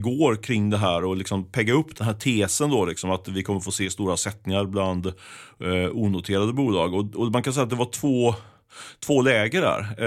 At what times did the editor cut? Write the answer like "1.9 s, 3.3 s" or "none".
none